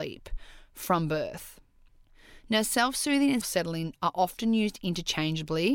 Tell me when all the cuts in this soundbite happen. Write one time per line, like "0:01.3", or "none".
0:03.4